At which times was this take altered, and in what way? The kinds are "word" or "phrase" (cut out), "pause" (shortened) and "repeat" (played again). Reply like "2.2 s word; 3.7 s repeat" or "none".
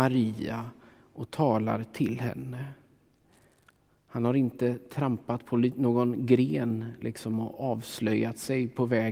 none